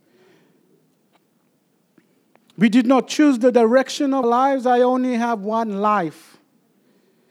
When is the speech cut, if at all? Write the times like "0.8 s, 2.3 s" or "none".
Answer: 4.2 s